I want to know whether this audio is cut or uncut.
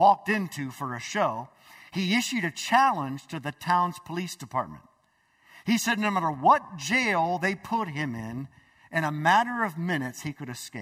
uncut